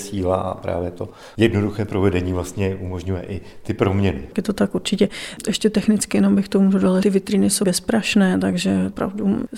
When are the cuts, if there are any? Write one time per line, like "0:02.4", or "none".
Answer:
0:07.0
0:07.6